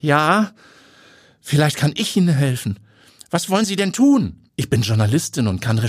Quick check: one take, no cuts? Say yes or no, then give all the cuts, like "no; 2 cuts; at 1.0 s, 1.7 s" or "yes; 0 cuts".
no; 1 cut; at 4.5 s